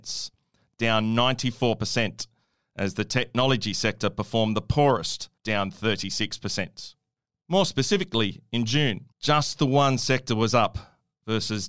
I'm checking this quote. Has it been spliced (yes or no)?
yes